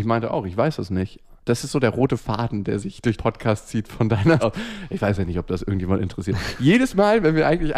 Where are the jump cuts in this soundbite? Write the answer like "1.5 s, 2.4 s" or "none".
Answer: 3.2 s, 4.4 s